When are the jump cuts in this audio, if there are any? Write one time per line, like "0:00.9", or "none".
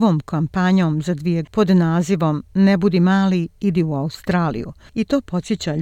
0:01.4

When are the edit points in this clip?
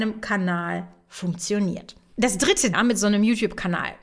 0:02.7

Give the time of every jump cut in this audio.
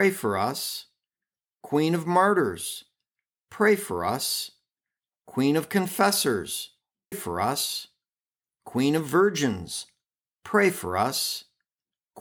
0:07.1

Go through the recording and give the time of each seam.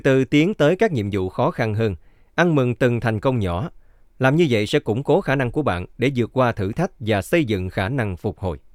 none

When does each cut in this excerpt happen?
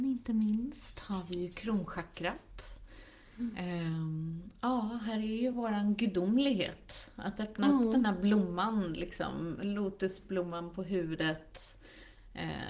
none

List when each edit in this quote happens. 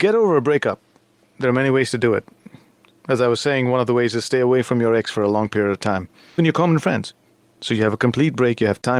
0:06.4

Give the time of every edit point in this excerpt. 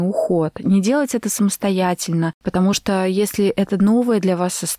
none

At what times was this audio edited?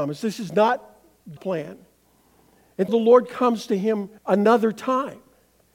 0:01.4
0:02.9
0:04.2

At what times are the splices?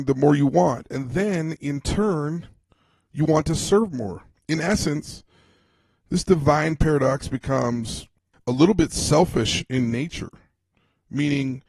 none

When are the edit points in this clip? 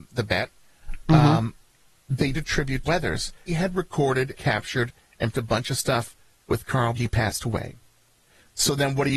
0:02.3
0:02.8
0:03.5
0:04.4
0:05.3
0:07.0

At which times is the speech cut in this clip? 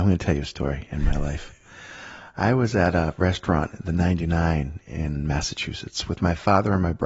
none

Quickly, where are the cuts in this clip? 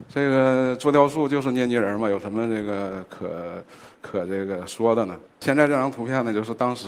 0:03.9
0:05.3

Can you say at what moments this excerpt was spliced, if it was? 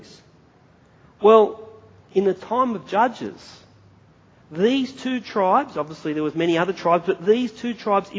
none

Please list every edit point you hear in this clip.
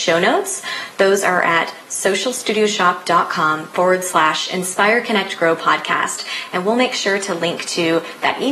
none

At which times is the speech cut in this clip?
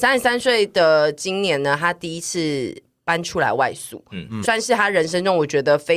0:04.4

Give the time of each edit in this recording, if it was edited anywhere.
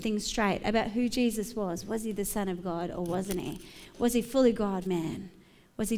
0:04.9

